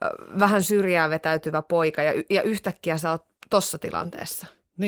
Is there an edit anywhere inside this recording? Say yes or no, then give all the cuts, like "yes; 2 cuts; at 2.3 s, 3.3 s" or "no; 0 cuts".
no; 0 cuts